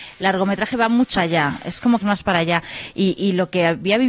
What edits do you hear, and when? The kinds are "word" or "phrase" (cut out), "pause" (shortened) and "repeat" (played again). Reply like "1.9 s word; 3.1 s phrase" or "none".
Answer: 1.1 s word; 2.0 s phrase